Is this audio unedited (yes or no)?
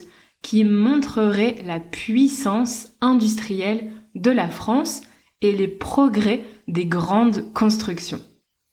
yes